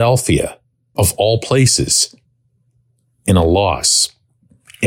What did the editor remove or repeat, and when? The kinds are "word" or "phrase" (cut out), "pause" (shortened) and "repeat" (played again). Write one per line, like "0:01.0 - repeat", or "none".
0:01.0 - word